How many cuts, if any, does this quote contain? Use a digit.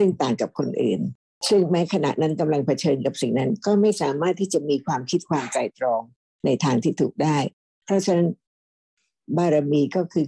0